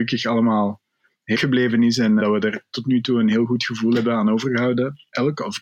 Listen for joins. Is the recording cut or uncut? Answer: cut